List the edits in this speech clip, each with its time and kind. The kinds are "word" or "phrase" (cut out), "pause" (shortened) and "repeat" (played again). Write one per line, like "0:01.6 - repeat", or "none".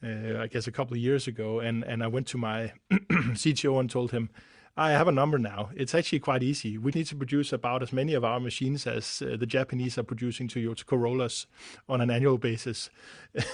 0:06.9 - word

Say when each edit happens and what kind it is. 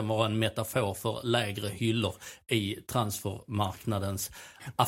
none

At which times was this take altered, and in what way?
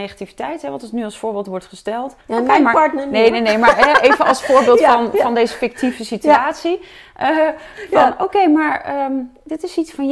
0:02.2 - pause

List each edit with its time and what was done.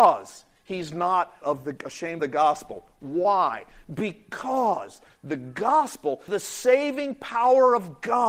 0:01.4 - word
0:02.2 - word
0:06.3 - word

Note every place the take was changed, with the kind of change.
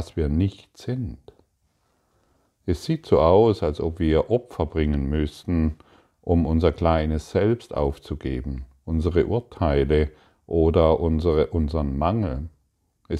none

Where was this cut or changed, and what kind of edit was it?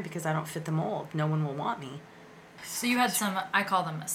none

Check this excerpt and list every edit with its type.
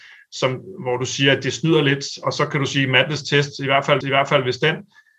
0:04.0 - repeat

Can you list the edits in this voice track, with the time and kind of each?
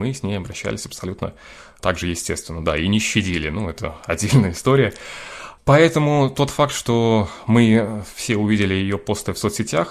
none

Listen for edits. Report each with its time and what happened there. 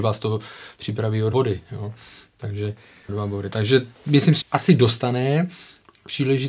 0:01.3 - word
0:03.1 - word
0:03.9 - pause
0:04.4 - word

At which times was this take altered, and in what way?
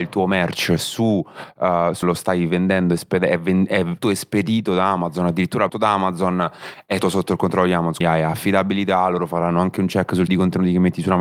0:02.0 - word
0:04.0 - word
0:05.7 - word
0:07.0 - word
0:08.0 - word
0:10.3 - word

